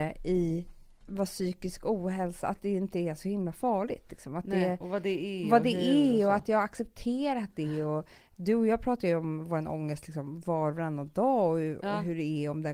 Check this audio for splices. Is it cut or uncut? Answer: uncut